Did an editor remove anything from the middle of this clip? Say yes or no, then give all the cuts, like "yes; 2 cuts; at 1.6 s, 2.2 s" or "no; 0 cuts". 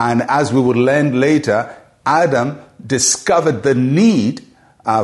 no; 0 cuts